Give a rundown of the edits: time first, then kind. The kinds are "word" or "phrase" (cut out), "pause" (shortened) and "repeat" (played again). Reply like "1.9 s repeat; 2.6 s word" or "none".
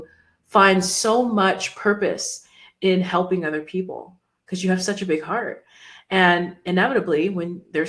none